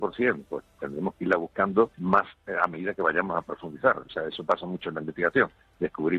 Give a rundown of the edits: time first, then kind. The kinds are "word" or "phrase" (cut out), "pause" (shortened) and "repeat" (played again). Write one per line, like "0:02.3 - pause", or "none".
0:01.9 - pause